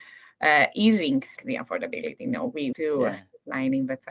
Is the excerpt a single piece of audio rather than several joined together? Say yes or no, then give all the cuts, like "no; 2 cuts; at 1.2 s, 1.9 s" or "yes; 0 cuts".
no; 2 cuts; at 1.4 s, 2.7 s